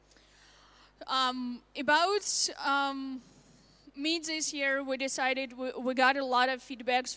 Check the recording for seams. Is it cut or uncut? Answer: uncut